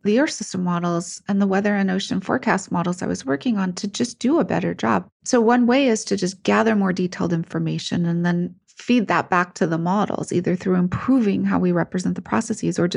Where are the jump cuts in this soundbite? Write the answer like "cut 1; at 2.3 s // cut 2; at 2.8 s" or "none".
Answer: cut 1; at 5.1 s // cut 2; at 8.6 s